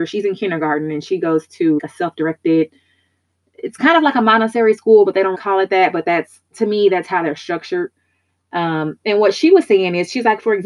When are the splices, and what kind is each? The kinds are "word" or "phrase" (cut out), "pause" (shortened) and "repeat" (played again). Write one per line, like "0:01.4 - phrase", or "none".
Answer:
0:01.8 - word
0:05.3 - word